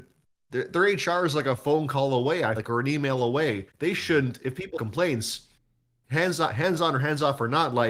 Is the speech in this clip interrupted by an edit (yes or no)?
yes